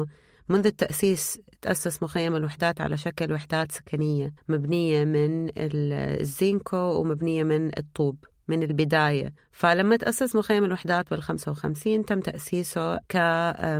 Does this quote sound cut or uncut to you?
cut